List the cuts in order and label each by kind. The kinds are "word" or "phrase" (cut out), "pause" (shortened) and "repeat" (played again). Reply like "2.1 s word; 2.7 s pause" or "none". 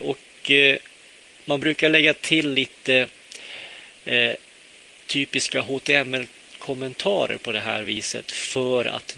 none